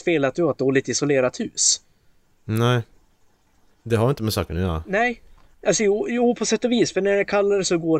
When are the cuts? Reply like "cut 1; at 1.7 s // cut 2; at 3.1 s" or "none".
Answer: none

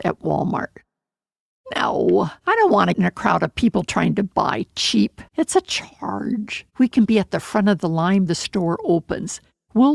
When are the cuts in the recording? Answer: cut 1; at 2.4 s // cut 2; at 2.9 s // cut 3; at 5.3 s // cut 4; at 6.7 s // cut 5; at 8.3 s

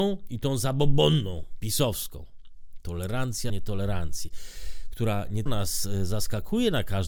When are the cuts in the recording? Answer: cut 1; at 3.5 s // cut 2; at 5.5 s

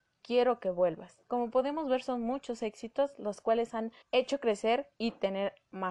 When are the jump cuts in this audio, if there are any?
cut 1; at 1.2 s // cut 2; at 4.0 s // cut 3; at 4.9 s

